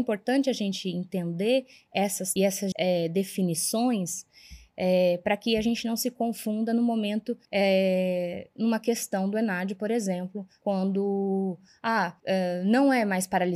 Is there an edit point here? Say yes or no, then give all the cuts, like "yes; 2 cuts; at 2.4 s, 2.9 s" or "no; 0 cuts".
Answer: yes; 3 cuts; at 2.4 s, 2.7 s, 7.4 s